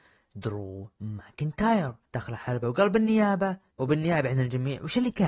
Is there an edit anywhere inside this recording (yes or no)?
yes